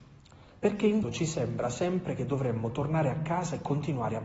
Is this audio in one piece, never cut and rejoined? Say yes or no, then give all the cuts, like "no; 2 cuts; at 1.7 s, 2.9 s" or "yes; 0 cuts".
no; 1 cut; at 1.0 s